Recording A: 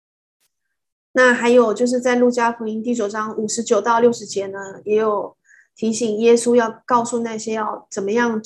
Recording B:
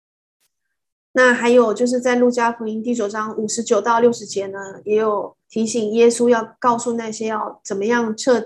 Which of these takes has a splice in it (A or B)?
B